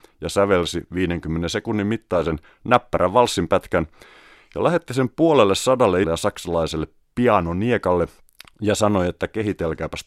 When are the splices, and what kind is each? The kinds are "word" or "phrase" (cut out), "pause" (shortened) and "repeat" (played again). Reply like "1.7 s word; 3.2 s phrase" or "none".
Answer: 6.0 s word